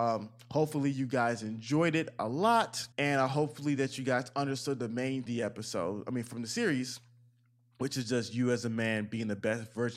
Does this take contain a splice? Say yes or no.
yes